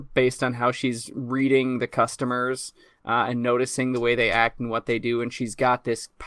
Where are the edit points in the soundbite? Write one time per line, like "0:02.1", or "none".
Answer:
none